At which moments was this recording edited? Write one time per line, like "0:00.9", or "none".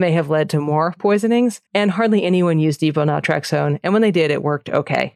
0:01.7

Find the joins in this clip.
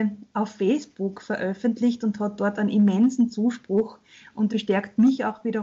0:04.5

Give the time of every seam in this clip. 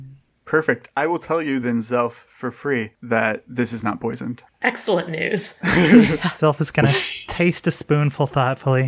none

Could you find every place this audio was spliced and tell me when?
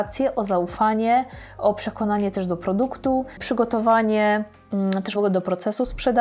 0:05.1

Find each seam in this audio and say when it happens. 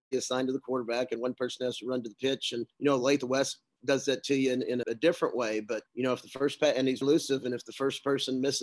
0:02.7
0:04.8
0:05.9
0:07.0

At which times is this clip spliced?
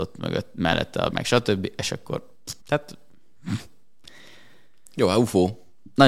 0:01.1
0:02.6

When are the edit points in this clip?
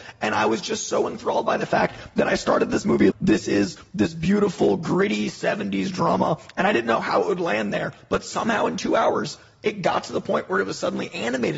0:03.1

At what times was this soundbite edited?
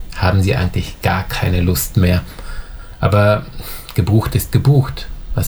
none

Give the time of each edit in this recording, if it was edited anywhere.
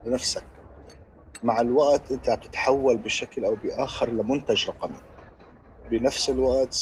none

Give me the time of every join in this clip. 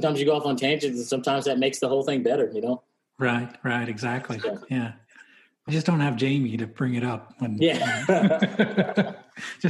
0:05.7

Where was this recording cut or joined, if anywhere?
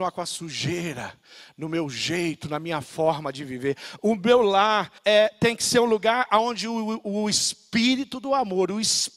0:05.0

